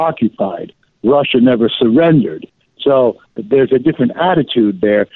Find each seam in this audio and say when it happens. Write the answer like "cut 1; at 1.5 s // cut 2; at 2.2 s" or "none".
none